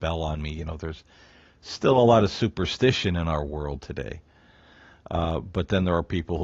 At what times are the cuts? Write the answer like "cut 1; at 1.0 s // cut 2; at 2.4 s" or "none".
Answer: none